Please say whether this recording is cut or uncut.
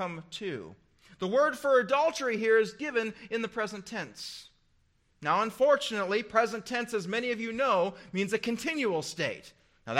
uncut